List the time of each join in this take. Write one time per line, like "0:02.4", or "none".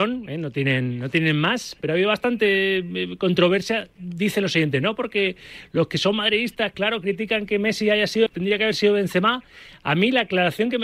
0:08.3